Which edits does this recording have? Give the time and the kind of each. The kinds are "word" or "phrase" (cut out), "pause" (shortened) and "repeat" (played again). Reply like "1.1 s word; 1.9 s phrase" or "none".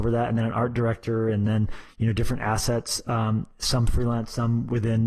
none